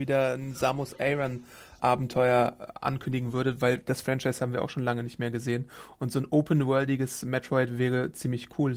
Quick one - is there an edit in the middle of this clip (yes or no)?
yes